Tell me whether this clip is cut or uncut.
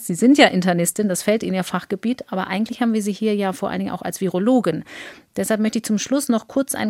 uncut